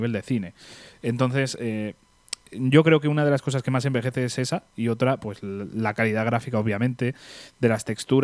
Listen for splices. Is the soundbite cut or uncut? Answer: uncut